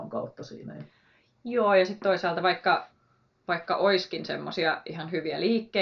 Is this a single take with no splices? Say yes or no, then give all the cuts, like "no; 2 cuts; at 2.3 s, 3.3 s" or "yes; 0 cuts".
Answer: yes; 0 cuts